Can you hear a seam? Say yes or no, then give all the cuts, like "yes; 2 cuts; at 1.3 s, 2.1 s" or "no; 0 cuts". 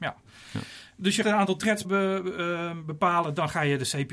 yes; 2 cuts; at 1.2 s, 1.8 s